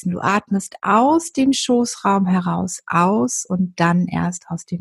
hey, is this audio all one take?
yes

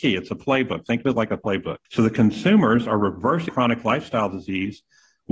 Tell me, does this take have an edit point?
yes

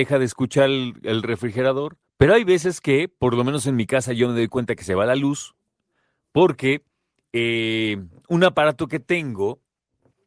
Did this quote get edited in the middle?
yes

